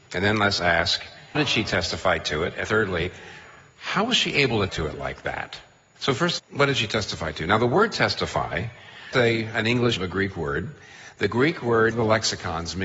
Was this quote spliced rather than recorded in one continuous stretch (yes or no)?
yes